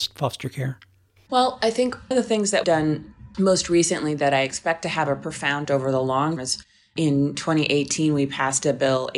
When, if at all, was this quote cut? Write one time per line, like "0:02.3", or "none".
0:02.1
0:02.6
0:05.6
0:06.4